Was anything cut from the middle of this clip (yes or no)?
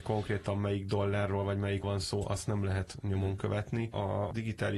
yes